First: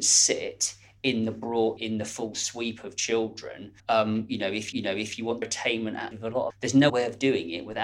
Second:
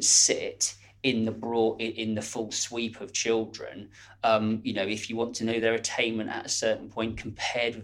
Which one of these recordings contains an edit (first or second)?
first